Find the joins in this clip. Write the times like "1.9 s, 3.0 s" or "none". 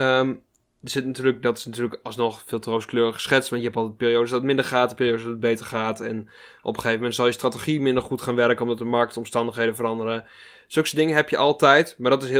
none

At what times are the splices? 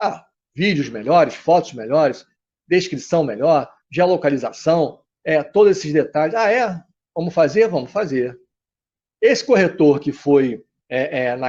none

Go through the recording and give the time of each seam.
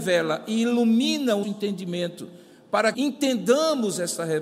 1.4 s, 2.9 s

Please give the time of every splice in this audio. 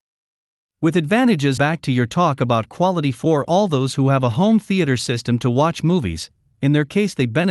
1.6 s

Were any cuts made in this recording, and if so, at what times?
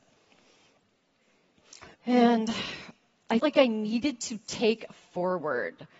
1.9 s, 3.4 s, 4.9 s

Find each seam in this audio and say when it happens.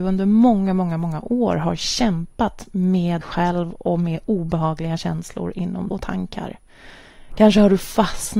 3.2 s, 5.9 s

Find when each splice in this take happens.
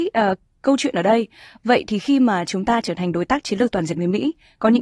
none

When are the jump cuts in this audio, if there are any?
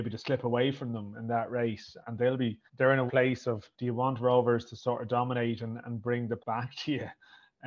2.0 s, 2.7 s, 3.1 s, 3.7 s, 6.4 s

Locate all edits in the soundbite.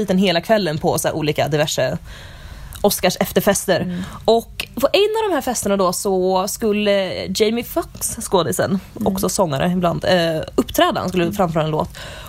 none

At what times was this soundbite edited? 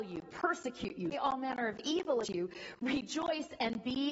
1.1 s, 2.2 s

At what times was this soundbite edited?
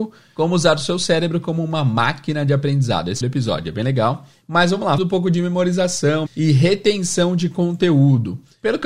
3.2 s, 5.0 s, 6.3 s

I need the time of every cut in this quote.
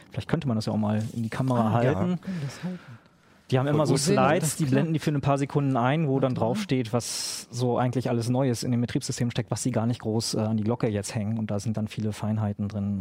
none

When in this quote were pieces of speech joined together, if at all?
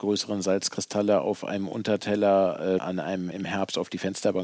2.8 s, 3.3 s

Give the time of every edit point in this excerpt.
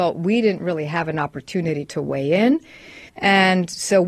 3.1 s

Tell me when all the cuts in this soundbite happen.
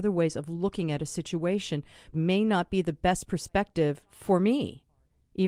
2.1 s

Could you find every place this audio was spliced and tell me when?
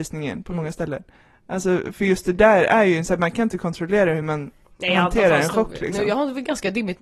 none

